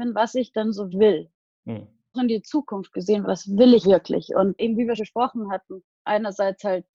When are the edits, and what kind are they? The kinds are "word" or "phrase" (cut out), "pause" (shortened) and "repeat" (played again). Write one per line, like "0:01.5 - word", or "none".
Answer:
0:00.9 - word
0:02.1 - word
0:03.2 - word
0:03.8 - word
0:04.6 - word
0:05.0 - word
0:06.0 - word